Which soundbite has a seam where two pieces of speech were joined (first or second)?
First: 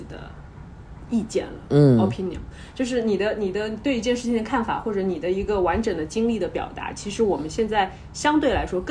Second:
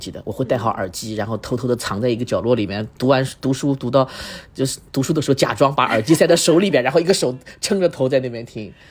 first